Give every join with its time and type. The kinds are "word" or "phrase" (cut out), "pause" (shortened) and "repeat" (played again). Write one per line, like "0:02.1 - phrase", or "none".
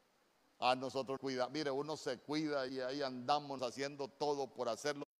0:01.2 - word
0:02.7 - word
0:03.6 - word